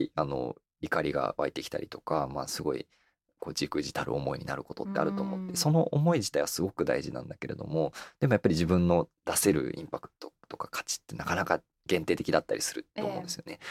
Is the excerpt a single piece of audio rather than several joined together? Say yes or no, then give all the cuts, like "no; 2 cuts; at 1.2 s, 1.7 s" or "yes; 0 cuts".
yes; 0 cuts